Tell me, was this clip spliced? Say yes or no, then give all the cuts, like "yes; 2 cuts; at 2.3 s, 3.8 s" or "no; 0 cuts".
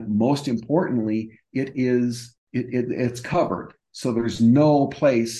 no; 0 cuts